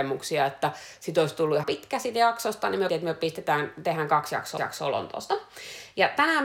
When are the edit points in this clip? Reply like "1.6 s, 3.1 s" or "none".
1.6 s, 2.9 s, 4.6 s